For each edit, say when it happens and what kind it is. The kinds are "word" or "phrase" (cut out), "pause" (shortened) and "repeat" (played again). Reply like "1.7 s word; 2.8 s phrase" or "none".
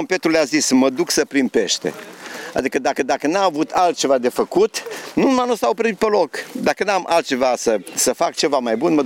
3.0 s repeat